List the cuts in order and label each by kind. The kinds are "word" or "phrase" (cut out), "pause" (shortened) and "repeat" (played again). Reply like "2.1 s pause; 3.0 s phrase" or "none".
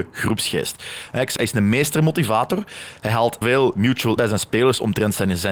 1.4 s word; 3.4 s word; 4.2 s word